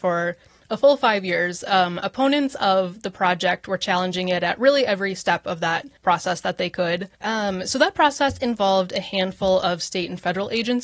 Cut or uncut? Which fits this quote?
cut